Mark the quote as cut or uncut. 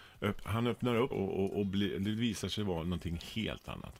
cut